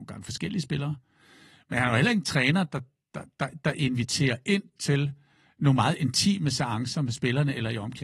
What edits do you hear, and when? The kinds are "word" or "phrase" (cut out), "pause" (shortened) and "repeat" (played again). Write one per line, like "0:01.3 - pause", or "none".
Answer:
none